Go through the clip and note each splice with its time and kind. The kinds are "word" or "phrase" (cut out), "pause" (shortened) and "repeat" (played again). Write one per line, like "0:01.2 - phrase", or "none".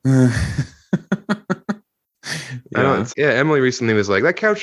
0:03.1 - word